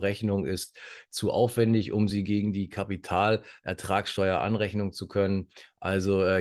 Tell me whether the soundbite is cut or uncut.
uncut